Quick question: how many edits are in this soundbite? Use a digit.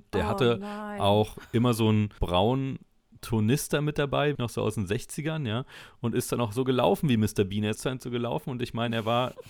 2